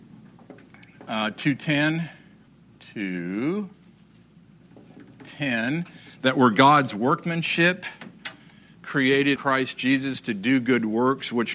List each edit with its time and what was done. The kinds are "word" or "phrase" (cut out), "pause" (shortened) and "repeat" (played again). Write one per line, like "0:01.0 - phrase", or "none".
0:02.5 - pause
0:09.4 - word